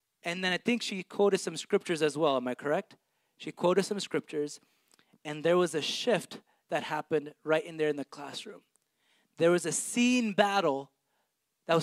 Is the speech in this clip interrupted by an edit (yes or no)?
no